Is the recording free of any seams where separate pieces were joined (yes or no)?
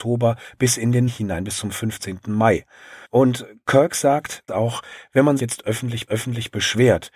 no